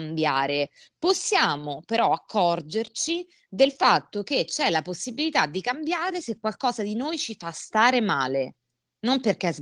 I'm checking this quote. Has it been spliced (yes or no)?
no